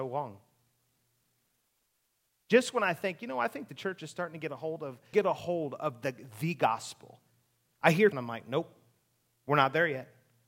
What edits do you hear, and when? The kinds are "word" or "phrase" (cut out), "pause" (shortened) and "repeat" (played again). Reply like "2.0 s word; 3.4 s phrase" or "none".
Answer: 5.1 s word; 8.1 s phrase